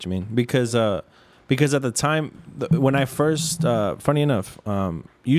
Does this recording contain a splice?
no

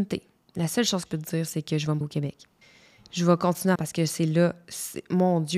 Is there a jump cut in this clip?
yes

